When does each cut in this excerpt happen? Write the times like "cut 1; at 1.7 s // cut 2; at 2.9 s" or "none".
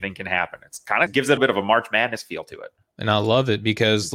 cut 1; at 1.1 s // cut 2; at 1.4 s